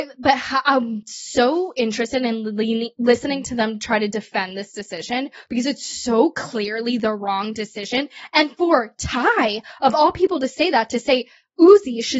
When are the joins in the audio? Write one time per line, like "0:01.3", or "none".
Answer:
none